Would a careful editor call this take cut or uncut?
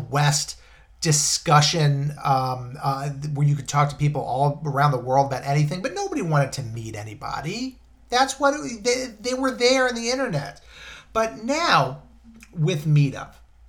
uncut